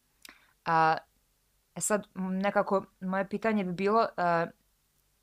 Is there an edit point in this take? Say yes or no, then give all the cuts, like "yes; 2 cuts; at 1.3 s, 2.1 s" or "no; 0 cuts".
no; 0 cuts